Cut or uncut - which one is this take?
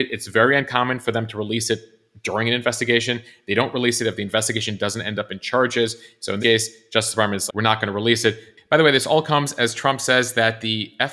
cut